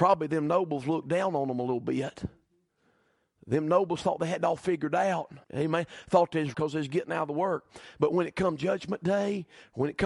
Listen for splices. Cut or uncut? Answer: cut